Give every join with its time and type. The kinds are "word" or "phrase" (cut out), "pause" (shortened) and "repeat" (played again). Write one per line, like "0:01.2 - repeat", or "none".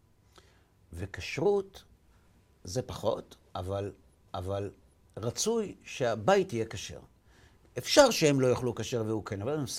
0:04.3 - repeat